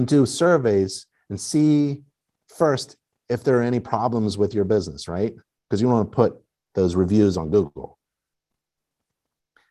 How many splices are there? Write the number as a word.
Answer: zero